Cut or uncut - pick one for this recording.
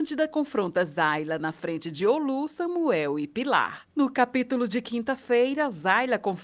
uncut